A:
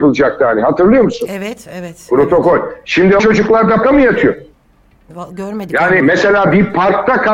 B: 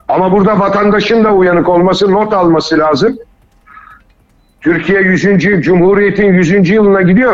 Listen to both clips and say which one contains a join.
A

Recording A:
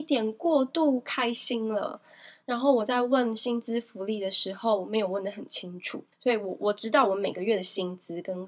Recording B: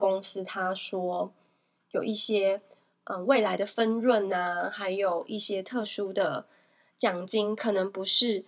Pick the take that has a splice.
A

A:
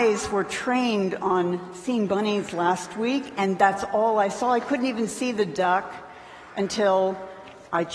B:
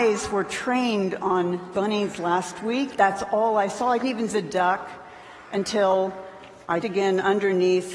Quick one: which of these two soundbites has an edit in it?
B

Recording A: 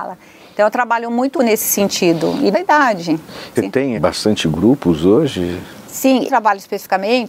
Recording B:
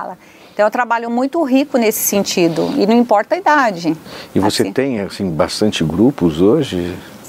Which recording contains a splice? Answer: A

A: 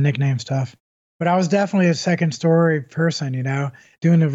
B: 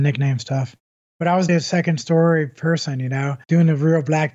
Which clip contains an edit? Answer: B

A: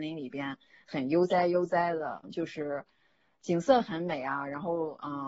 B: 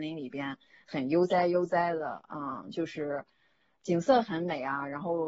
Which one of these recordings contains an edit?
A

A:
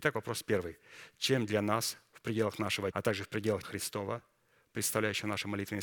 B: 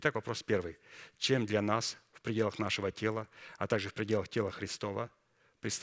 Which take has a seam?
A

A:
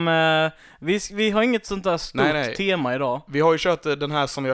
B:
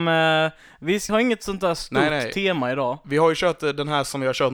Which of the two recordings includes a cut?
B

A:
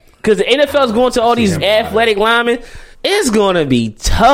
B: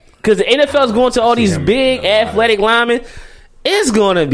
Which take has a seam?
A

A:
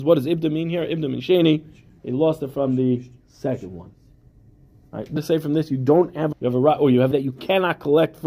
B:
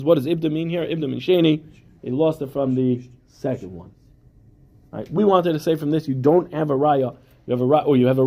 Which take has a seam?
A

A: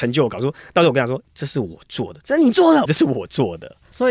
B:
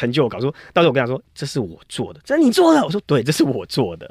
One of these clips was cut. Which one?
A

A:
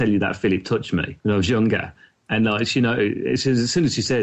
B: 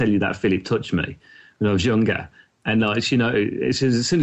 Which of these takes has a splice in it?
A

